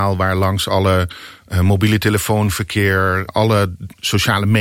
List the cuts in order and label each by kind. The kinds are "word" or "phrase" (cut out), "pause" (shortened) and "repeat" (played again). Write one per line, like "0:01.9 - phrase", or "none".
0:03.3 - word